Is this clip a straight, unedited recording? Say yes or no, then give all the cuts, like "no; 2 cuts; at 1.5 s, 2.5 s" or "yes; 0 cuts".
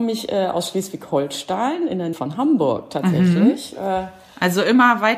no; 1 cut; at 2.1 s